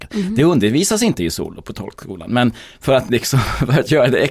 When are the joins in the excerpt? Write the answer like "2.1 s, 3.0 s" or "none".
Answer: none